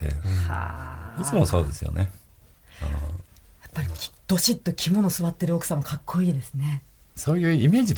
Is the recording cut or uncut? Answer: uncut